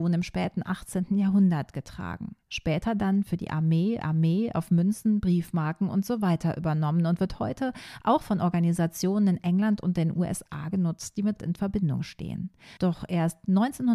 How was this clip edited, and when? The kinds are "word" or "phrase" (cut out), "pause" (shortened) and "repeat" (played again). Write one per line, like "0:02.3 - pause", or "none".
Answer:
0:04.0 - repeat
0:11.4 - word
0:12.8 - pause